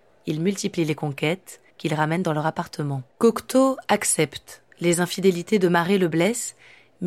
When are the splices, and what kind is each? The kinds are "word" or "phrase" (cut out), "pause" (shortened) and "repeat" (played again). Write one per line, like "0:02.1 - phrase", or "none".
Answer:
0:01.7 - pause
0:03.1 - pause
0:04.7 - pause